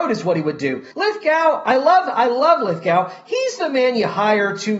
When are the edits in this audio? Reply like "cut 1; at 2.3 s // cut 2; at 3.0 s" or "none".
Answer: cut 1; at 0.9 s